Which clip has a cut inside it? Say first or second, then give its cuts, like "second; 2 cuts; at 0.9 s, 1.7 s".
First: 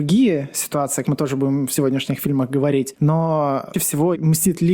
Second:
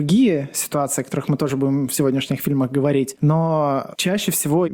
first; 2 cuts; at 1.0 s, 3.7 s